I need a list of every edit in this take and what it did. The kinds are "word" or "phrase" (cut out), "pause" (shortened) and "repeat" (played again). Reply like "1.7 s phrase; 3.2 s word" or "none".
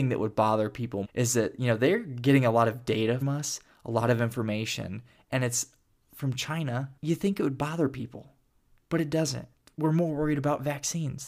1.0 s word; 3.2 s word; 7.0 s pause